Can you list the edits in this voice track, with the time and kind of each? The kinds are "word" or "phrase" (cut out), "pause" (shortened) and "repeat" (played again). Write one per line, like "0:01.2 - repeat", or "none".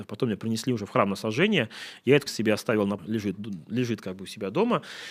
0:02.3 - word
0:03.0 - phrase